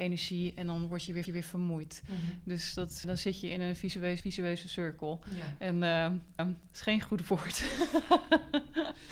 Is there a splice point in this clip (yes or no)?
yes